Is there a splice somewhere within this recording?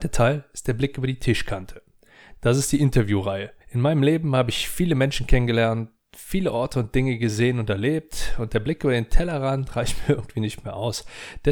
yes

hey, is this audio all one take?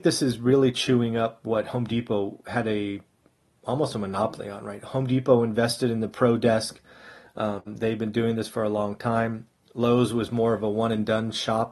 yes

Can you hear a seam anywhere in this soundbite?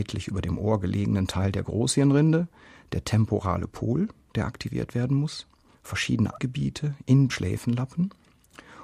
yes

